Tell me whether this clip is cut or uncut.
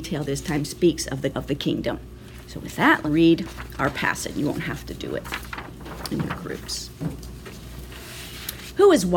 cut